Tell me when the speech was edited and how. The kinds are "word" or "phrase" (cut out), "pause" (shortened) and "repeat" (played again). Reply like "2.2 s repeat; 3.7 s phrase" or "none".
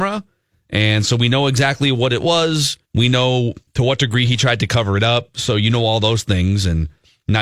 2.9 s pause; 3.7 s pause